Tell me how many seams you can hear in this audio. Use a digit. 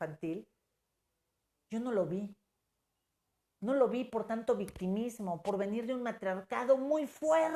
0